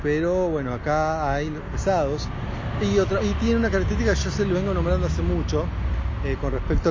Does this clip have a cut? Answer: yes; 2 cuts; at 1.7 s, 3.2 s

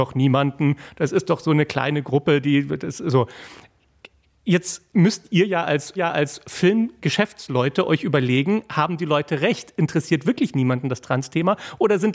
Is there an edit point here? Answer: yes; 2 cuts; at 4.9 s, 6.0 s

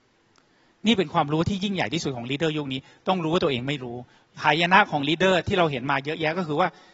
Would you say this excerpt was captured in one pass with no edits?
yes; 0 cuts

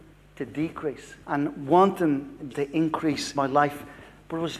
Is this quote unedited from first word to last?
no; 3 cuts; at 1.2 s, 2.5 s, 3.3 s

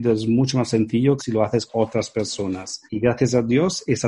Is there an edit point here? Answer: yes; 3 cuts; at 1.2 s, 1.7 s, 2.9 s

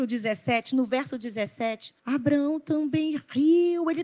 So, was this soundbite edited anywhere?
yes; 1 cut; at 2.0 s

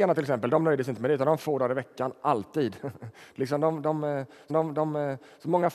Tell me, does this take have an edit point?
yes; 2 cuts; at 1.4 s, 4.5 s

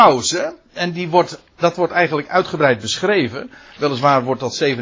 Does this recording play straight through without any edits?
no; 1 cut; at 1.5 s

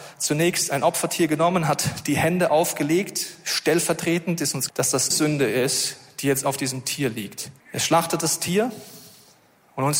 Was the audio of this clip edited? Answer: yes; 3 cuts; at 4.7 s, 5.1 s, 7.6 s

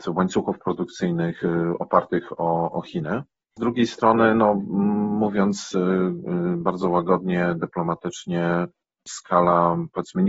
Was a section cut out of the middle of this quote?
no; 0 cuts

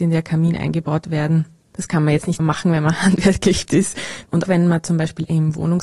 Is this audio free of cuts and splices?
no; 3 cuts; at 2.4 s, 3.7 s, 4.4 s

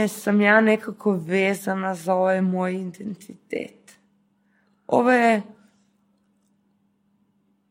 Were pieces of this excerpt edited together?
no; 0 cuts

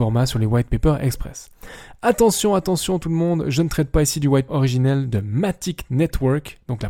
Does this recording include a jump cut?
yes; 1 cut; at 4.5 s

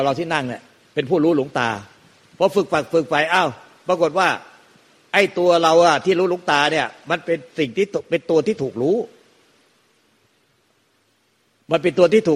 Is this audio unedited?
yes; 0 cuts

